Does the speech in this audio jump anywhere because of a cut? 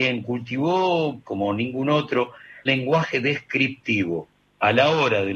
yes; 2 cuts; at 1.2 s, 2.7 s

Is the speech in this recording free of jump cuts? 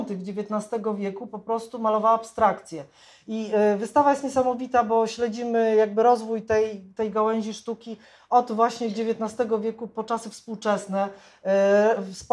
yes; 0 cuts

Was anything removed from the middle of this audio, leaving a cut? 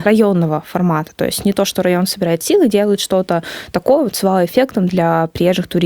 no; 0 cuts

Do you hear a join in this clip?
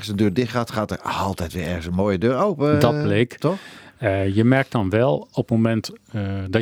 no; 0 cuts

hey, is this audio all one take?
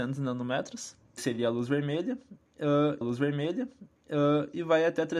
no; 2 cuts; at 1.2 s, 3.0 s

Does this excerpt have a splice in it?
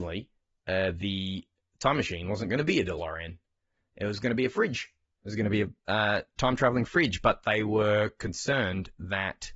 no; 0 cuts

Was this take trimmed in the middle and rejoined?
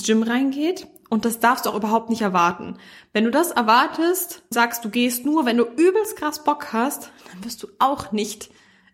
yes; 1 cut; at 4.5 s

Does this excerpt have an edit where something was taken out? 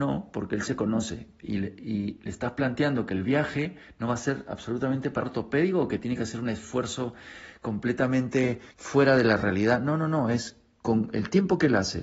yes; 2 cuts; at 5.2 s, 8.7 s

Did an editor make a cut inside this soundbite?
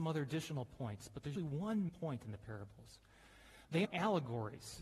yes; 3 cuts; at 1.4 s, 1.9 s, 3.8 s

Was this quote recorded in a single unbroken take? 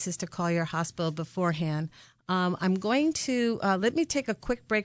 yes; 0 cuts

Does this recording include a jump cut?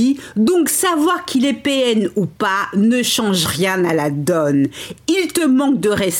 no; 0 cuts

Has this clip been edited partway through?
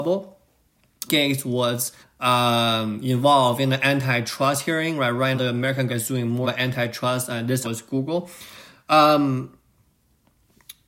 yes; 6 cuts; at 1.1 s, 2.0 s, 5.3 s, 5.9 s, 6.4 s, 7.6 s

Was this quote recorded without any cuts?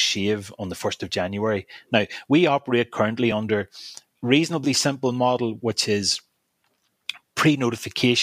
yes; 0 cuts

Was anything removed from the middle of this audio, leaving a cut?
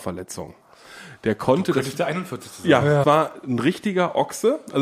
yes; 1 cut; at 3.0 s

